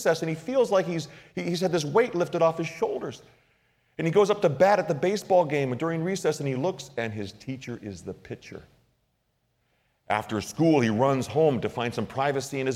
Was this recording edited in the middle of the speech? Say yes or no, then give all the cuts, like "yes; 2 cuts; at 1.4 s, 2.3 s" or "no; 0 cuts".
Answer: no; 0 cuts